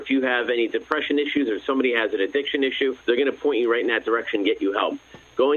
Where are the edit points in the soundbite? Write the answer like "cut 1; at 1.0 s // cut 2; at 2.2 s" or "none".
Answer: cut 1; at 3.0 s